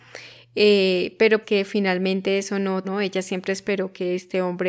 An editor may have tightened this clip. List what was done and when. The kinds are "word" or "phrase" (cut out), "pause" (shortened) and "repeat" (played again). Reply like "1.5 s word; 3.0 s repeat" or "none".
1.4 s word; 2.8 s word